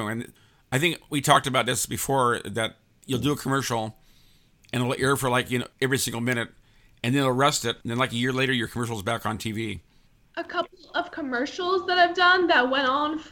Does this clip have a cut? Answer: yes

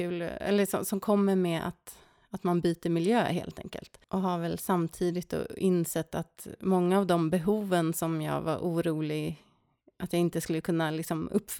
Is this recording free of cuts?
yes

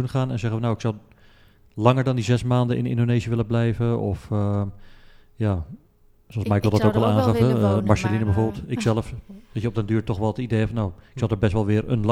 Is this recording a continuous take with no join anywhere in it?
yes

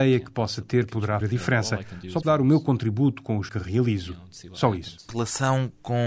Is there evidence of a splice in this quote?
yes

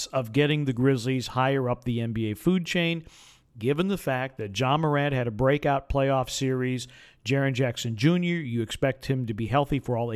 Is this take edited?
no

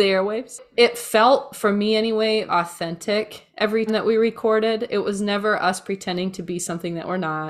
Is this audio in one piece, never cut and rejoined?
no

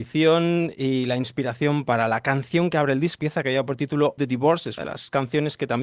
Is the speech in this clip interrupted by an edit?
yes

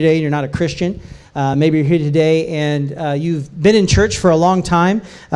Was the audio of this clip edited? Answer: no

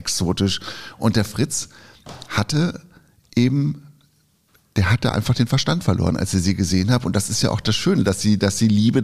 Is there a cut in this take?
no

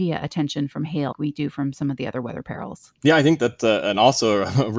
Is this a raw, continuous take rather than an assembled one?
no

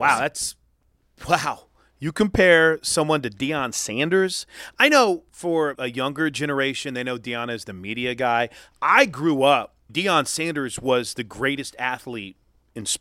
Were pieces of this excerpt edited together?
yes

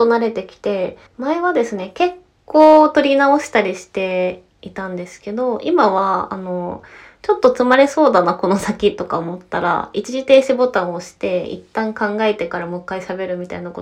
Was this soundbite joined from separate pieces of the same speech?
yes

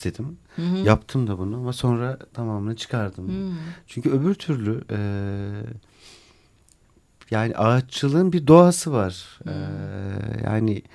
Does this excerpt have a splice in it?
no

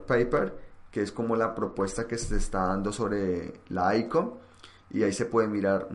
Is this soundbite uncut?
yes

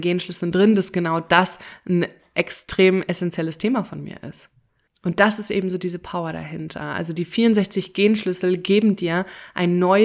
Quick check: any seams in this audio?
yes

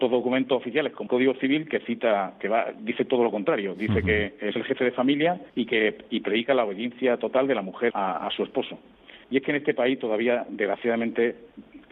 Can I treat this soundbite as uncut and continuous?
no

